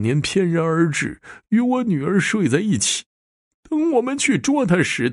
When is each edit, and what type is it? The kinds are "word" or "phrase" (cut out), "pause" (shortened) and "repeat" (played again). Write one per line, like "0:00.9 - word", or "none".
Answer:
none